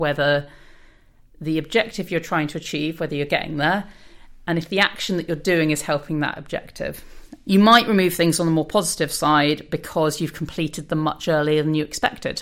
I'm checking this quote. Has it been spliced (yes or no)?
no